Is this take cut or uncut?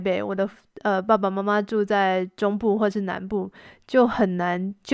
uncut